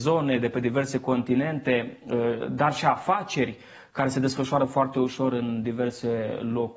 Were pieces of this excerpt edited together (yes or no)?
no